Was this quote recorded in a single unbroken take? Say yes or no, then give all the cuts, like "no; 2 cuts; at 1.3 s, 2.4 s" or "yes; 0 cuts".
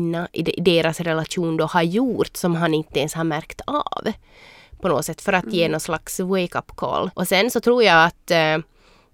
no; 1 cut; at 7.1 s